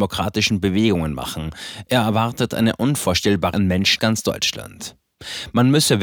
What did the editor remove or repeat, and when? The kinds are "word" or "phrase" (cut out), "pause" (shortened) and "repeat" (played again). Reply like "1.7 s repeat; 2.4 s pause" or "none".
3.5 s word; 4.0 s word